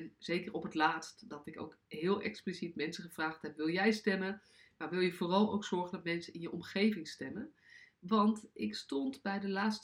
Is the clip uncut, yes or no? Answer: yes